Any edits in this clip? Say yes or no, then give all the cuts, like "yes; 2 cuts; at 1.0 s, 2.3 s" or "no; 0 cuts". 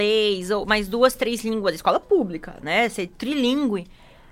no; 0 cuts